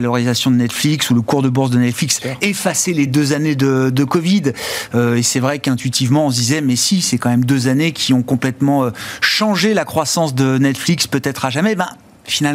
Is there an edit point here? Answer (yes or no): no